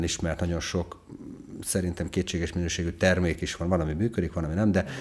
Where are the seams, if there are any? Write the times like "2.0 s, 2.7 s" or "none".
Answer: none